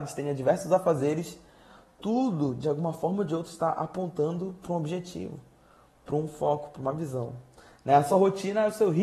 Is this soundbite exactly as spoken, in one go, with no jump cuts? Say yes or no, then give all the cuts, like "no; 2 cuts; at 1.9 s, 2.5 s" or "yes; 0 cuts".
yes; 0 cuts